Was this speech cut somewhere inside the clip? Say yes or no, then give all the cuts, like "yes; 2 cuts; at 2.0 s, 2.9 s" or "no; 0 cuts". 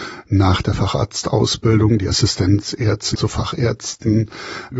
yes; 1 cut; at 3.1 s